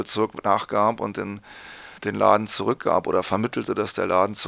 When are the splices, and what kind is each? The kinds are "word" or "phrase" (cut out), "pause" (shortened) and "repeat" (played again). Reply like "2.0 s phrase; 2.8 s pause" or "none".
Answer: 2.0 s pause